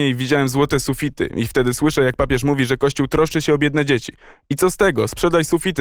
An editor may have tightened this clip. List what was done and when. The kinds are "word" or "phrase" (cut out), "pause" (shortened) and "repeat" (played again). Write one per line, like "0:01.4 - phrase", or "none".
none